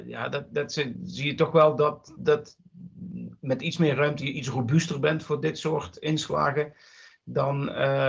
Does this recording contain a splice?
no; 0 cuts

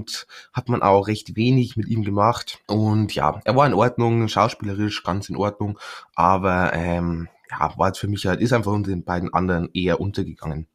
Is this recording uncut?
no; 1 cut; at 2.6 s

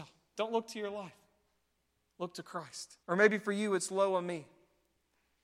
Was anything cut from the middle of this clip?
yes; 1 cut; at 3.0 s

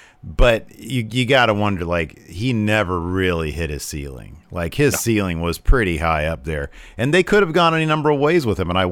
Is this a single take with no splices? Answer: yes; 0 cuts

